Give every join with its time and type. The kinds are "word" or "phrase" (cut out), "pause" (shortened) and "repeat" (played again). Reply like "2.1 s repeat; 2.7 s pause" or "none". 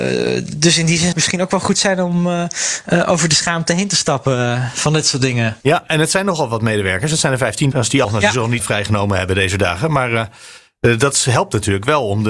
1.1 s phrase; 5.6 s pause; 7.7 s word; 8.0 s word; 8.6 s word